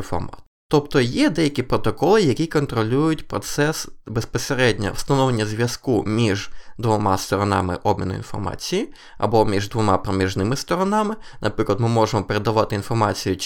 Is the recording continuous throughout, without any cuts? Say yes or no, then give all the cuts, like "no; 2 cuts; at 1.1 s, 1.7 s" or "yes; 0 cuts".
yes; 0 cuts